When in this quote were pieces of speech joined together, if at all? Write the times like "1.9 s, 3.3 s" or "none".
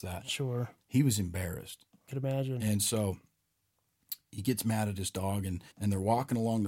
2.1 s, 5.7 s